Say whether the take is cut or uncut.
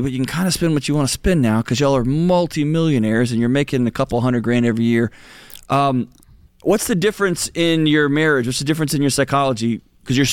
cut